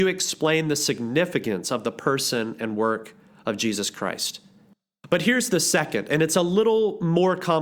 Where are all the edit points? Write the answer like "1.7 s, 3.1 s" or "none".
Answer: none

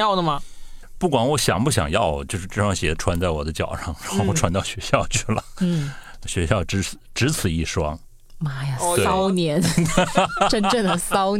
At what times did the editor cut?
none

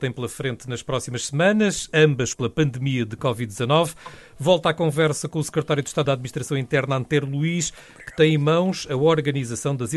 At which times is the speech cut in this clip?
2.3 s, 6.1 s

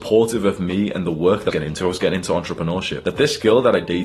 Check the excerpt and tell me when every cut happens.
1.5 s

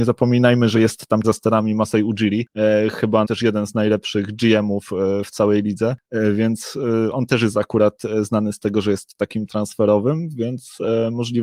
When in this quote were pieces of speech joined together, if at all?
1.2 s, 3.2 s, 9.5 s

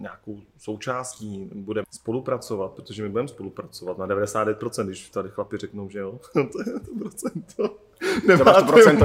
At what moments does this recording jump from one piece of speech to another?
1.8 s

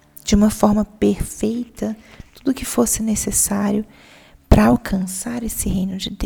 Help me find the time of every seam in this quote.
none

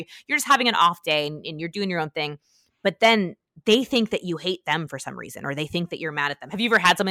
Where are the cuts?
none

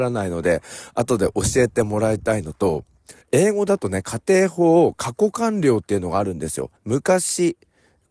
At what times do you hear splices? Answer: 3.2 s, 6.8 s

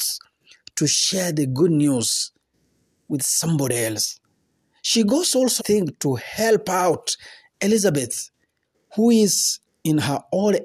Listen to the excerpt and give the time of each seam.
5.6 s

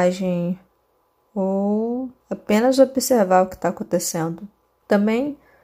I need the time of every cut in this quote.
2.2 s

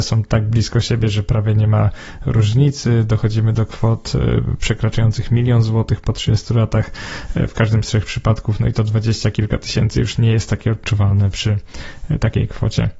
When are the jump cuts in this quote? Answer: none

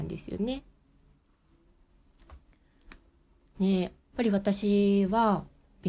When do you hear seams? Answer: 4.0 s

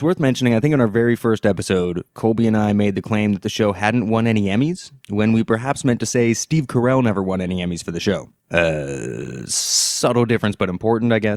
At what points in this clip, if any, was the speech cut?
5.0 s

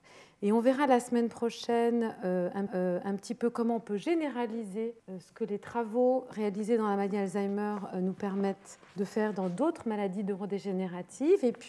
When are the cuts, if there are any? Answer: 2.7 s, 5.0 s, 8.9 s

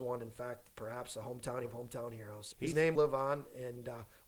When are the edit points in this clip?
1.7 s, 2.5 s, 2.9 s

